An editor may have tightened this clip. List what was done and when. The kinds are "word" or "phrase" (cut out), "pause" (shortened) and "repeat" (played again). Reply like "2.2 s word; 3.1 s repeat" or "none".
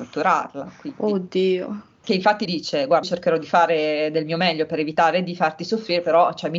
2.0 s word; 2.5 s phrase; 3.0 s word